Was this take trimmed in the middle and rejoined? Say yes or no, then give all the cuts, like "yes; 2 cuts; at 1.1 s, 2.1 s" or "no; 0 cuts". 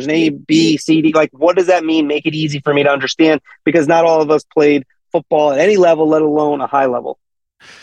no; 0 cuts